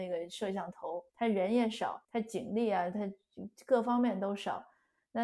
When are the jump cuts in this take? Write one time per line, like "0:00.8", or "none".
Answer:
0:01.1
0:02.0